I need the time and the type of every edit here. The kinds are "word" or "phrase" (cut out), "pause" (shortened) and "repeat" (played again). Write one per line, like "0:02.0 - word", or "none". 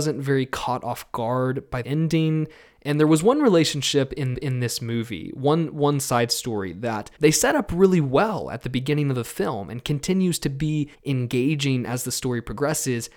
0:01.8 - word
0:04.3 - repeat
0:07.2 - pause
0:10.9 - pause